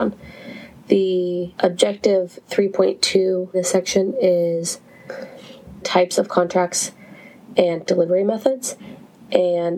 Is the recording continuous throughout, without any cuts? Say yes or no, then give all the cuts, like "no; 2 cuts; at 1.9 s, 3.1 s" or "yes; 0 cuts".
no; 4 cuts; at 1.5 s, 3.5 s, 5.8 s, 7.8 s